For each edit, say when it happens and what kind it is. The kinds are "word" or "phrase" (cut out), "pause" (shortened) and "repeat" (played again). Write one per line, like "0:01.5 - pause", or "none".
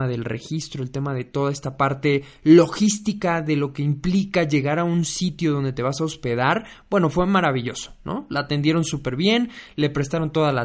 none